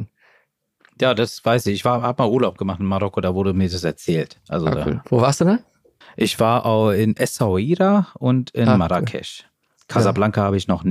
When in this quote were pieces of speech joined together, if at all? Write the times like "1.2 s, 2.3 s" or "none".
6.0 s